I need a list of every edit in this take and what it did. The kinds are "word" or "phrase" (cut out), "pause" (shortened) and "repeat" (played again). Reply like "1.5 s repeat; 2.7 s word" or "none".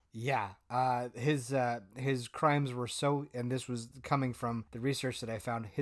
4.7 s pause